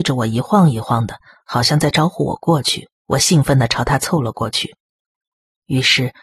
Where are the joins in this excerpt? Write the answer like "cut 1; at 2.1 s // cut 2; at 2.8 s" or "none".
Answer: cut 1; at 3.0 s